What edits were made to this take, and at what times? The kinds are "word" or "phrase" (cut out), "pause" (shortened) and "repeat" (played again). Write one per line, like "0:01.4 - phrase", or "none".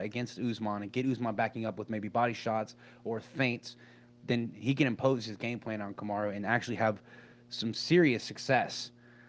none